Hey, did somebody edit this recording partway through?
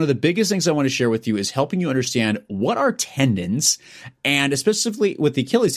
no; 0 cuts

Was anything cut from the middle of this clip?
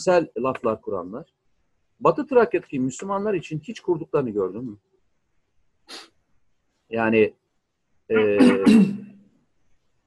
no; 0 cuts

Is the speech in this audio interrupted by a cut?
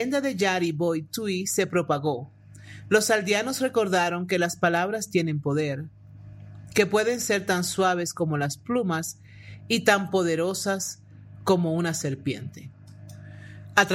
no; 0 cuts

